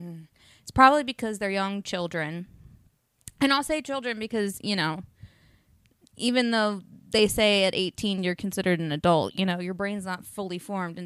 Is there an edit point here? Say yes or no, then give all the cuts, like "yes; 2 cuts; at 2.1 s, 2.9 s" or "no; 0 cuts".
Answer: no; 0 cuts